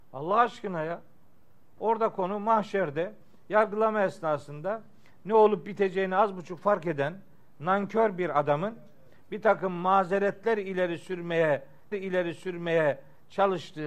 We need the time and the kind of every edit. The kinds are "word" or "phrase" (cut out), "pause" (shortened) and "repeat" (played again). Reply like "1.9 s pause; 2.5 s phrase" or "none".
11.9 s repeat